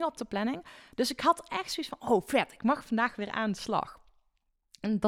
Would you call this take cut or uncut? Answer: uncut